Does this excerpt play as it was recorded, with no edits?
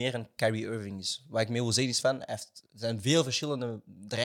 yes; 0 cuts

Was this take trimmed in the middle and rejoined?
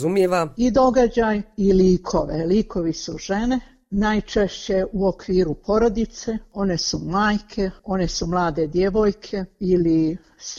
no; 0 cuts

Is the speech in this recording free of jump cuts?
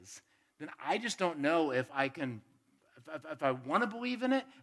no; 1 cut; at 3.2 s

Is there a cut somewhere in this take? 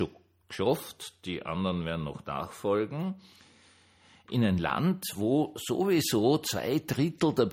no; 0 cuts

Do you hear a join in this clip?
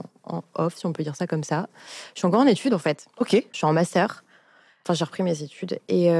yes; 1 cut; at 3.5 s

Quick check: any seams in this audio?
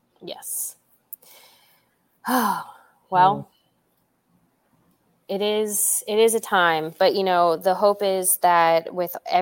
no; 0 cuts

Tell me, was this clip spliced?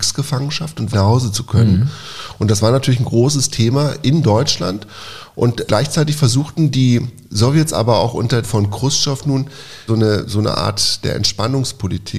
yes; 4 cuts; at 0.9 s, 5.7 s, 8.4 s, 9.9 s

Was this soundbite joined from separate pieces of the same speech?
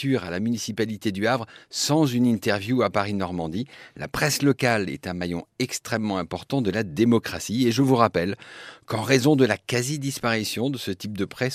no; 0 cuts

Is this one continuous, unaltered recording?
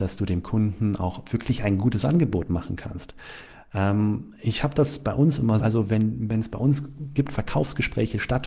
no; 2 cuts; at 5.6 s, 7.2 s

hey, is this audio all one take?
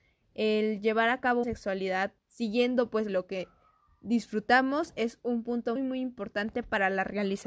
no; 4 cuts; at 1.4 s, 2.2 s, 3.1 s, 5.8 s

